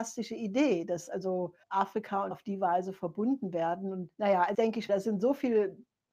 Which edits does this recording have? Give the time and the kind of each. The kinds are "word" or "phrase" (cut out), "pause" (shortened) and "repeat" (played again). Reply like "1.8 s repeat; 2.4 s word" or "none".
1.6 s pause; 2.3 s word; 4.1 s pause; 4.5 s word; 4.9 s word

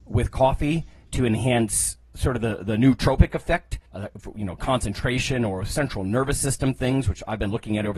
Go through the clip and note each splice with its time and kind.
3.9 s pause

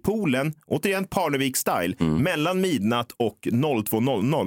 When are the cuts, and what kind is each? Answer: none

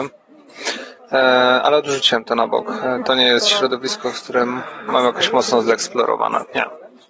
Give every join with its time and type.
none

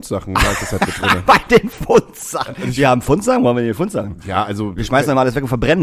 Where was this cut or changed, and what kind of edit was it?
none

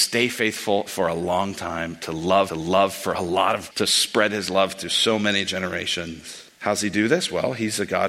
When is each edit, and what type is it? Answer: 2.5 s repeat; 3.7 s word; 6.5 s pause

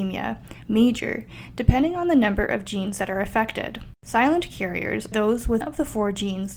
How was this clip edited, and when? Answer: 5.1 s word; 5.6 s word

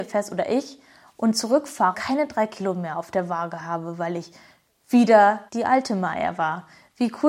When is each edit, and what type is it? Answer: 1.9 s word; 5.5 s pause

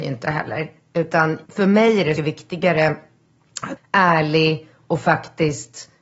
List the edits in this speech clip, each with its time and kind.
1.5 s pause; 2.2 s phrase; 3.8 s word

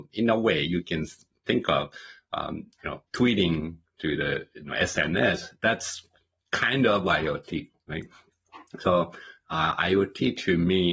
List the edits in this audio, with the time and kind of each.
3.1 s pause

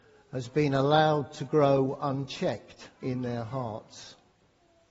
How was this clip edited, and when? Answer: 3.0 s pause

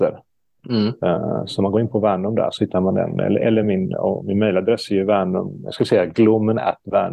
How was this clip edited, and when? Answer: none

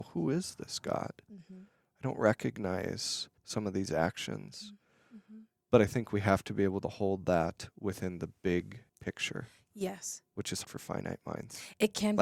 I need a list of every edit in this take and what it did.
3.4 s pause; 8.9 s pause; 10.6 s word

